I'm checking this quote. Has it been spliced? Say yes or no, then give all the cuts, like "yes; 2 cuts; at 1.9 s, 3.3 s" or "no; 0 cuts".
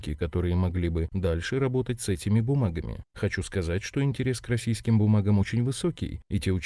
no; 0 cuts